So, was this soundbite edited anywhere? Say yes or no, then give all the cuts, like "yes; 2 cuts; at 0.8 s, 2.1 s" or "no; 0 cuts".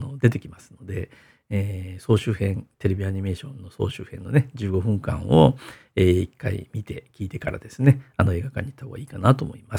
no; 0 cuts